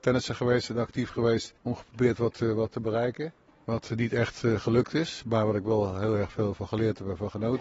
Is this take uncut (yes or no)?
no